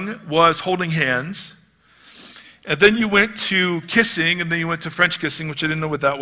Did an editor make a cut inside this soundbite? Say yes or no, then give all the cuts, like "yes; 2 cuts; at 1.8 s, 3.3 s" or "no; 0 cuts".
no; 0 cuts